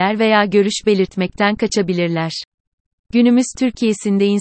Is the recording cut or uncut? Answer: uncut